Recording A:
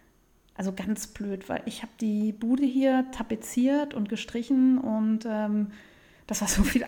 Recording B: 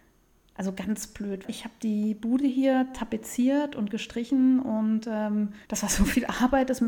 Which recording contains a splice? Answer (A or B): B